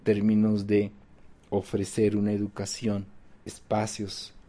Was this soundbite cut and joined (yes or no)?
no